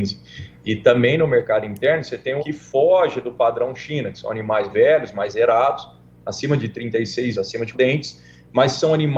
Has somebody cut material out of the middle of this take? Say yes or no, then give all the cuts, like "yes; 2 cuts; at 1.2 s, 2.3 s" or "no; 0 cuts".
yes; 4 cuts; at 2.4 s, 4.7 s, 7.3 s, 7.7 s